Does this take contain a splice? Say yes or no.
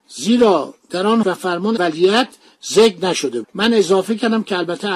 yes